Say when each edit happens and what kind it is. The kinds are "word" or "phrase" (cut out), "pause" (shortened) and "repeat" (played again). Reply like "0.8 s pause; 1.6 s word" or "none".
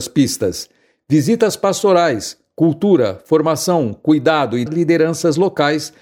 4.7 s word